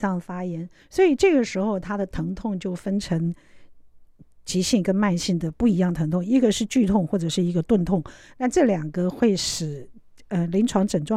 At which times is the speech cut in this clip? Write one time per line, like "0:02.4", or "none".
none